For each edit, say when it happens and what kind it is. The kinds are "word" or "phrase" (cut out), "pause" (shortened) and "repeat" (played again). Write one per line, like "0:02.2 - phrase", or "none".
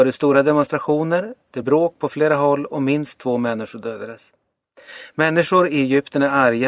0:01.6 - word